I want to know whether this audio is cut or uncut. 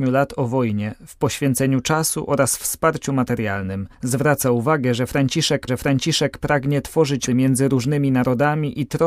cut